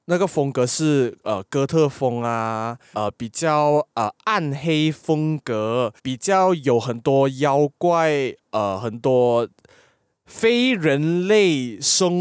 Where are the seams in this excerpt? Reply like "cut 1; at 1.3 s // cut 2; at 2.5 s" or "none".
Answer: cut 1; at 2.9 s // cut 2; at 6.0 s